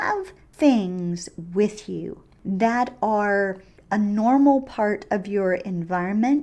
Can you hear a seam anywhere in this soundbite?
no; 0 cuts

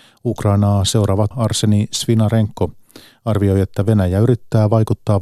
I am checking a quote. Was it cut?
yes; 1 cut; at 1.3 s

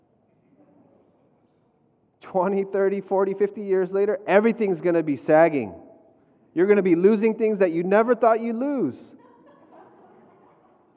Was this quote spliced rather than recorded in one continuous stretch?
no; 0 cuts

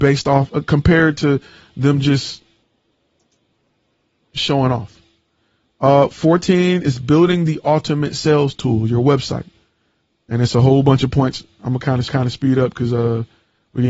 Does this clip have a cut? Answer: yes; 1 cut; at 12.1 s

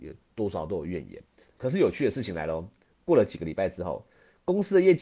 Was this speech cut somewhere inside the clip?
no; 0 cuts

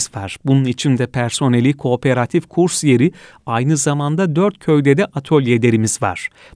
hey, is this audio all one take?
yes; 0 cuts

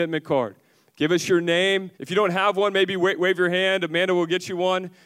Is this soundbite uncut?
no; 1 cut; at 1.9 s

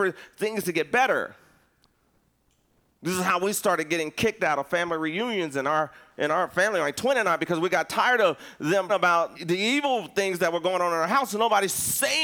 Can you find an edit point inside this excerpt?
yes; 2 cuts; at 8.9 s, 9.3 s

